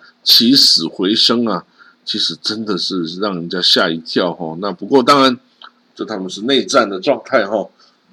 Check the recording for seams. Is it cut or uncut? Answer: uncut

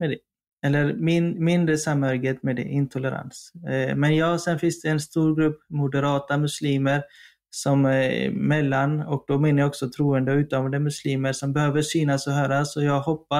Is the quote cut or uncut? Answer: uncut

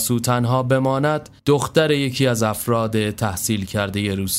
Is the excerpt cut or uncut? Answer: cut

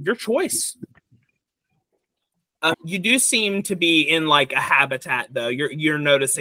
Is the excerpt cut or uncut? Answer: cut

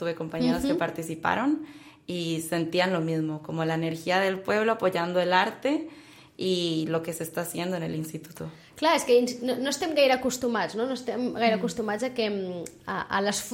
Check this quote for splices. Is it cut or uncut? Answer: uncut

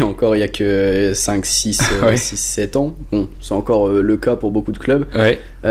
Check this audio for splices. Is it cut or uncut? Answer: uncut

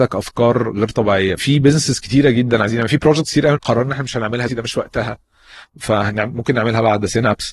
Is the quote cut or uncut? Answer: cut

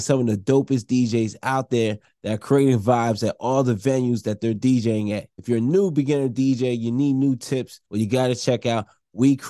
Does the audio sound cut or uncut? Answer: uncut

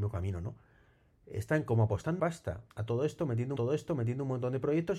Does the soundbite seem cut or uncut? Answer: cut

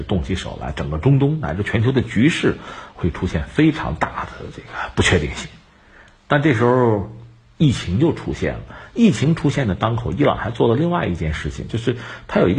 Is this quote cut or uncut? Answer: uncut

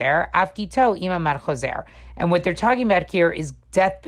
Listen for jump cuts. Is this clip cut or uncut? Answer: uncut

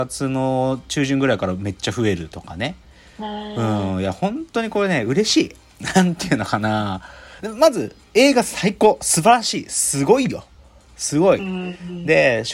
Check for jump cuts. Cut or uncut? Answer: uncut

